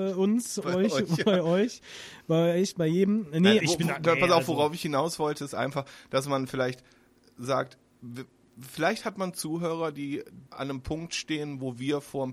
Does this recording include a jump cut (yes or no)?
yes